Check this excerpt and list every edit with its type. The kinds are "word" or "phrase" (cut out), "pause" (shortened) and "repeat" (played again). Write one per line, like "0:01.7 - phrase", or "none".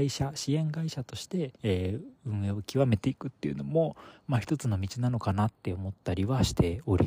0:01.6 - pause